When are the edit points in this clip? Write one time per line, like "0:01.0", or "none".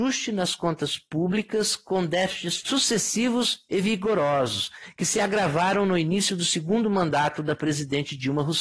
0:02.6